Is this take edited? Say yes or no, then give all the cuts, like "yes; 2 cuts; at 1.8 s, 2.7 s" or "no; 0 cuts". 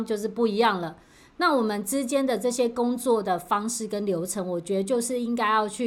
no; 0 cuts